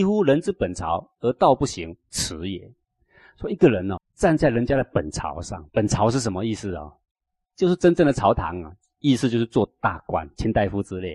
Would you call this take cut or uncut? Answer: cut